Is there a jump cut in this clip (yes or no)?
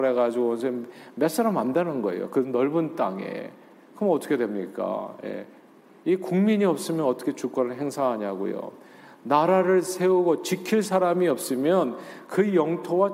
no